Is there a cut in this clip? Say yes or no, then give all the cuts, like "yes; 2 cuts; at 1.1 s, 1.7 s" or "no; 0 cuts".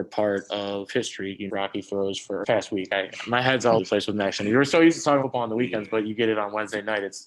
yes; 4 cuts; at 1.5 s, 2.4 s, 3.8 s, 5.2 s